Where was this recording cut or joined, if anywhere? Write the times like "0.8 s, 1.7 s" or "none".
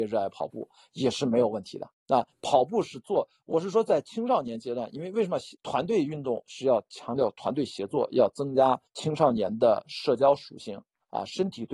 1.9 s, 5.5 s, 8.9 s